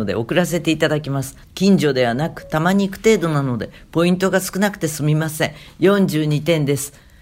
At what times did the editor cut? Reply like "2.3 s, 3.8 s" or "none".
1.4 s